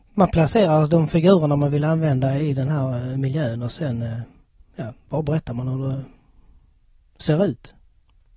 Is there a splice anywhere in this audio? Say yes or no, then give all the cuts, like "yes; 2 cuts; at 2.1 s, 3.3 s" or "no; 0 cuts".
yes; 1 cut; at 4.6 s